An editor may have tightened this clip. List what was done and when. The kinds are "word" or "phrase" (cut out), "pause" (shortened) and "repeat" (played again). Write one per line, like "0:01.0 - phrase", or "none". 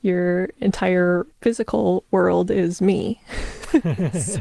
0:01.3 - pause